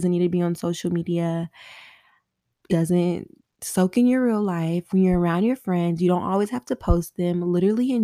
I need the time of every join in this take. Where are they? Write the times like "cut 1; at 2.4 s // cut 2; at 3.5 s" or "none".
cut 1; at 2.7 s